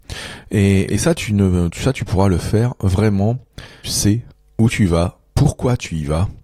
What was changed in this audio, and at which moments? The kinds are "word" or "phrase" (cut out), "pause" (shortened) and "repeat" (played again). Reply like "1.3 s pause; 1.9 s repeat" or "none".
1.7 s word; 3.8 s phrase; 4.3 s pause